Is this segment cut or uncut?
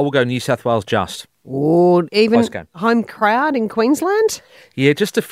uncut